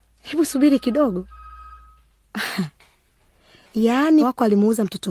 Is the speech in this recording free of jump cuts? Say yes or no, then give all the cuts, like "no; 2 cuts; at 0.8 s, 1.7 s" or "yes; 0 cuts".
no; 1 cut; at 4.2 s